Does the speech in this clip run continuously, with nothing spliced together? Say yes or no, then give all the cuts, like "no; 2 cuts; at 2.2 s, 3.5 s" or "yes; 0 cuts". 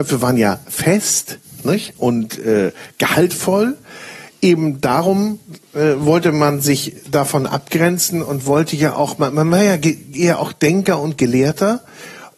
yes; 0 cuts